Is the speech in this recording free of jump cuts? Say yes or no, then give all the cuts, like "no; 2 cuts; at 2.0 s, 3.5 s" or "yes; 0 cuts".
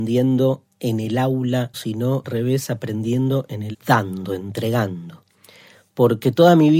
no; 3 cuts; at 1.7 s, 2.2 s, 3.7 s